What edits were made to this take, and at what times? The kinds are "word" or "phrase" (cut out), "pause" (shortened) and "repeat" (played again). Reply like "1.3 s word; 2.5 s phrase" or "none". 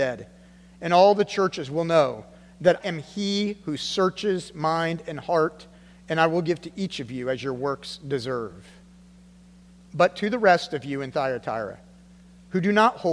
2.8 s word